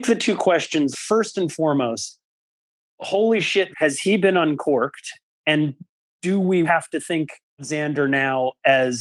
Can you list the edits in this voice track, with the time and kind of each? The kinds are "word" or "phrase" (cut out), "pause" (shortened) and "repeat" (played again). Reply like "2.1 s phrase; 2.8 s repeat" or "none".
0.9 s word; 3.7 s word; 6.6 s word; 7.6 s word